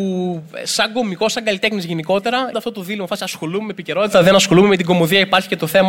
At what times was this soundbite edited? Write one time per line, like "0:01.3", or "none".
0:02.5